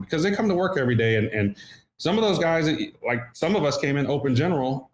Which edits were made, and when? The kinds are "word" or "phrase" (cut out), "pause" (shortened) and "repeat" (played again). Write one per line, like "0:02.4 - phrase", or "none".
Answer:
none